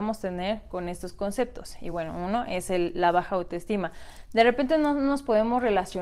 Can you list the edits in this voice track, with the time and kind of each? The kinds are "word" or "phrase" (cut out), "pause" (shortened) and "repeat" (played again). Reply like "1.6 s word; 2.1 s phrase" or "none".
none